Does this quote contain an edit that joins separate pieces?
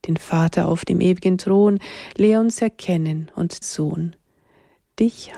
yes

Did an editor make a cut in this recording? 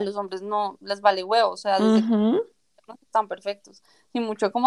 no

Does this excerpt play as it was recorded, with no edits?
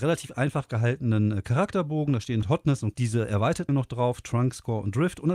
no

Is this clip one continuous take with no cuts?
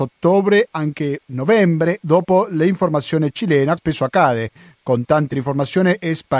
no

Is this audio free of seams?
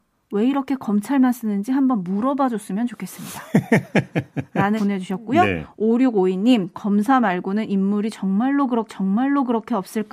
no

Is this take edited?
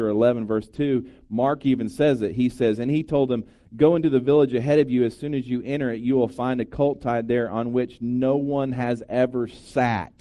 no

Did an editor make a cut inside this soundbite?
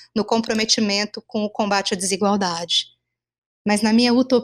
no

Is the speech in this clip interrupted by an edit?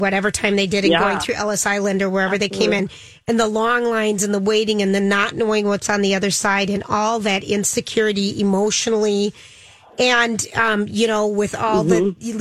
no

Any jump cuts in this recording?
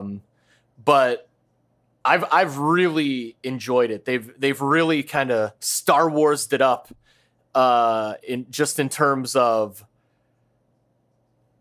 yes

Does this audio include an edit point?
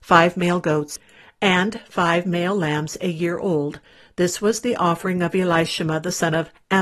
no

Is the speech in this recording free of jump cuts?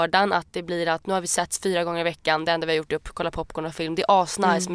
yes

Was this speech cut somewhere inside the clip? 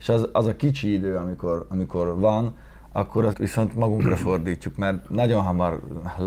yes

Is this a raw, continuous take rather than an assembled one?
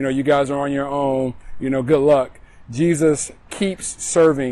yes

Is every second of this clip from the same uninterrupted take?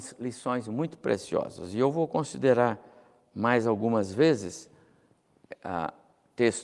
yes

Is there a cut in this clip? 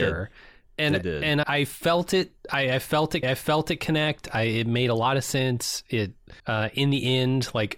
yes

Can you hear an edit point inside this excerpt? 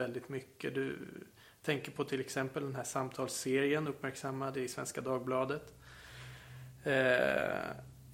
no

